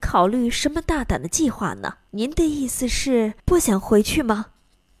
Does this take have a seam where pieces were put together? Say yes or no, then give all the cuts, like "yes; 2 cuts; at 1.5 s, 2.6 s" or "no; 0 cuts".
yes; 2 cuts; at 2.1 s, 3.4 s